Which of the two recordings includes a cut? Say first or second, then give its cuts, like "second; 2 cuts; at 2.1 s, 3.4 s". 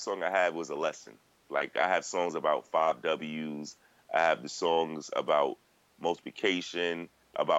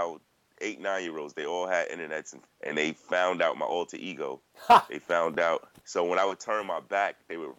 second; 2 cuts; at 2.4 s, 5.8 s